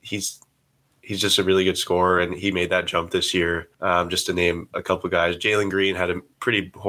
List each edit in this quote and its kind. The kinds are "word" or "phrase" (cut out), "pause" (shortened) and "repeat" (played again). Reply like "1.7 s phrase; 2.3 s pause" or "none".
3.7 s pause